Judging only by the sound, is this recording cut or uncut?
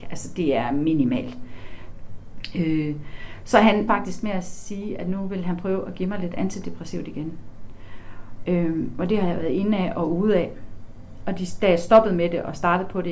cut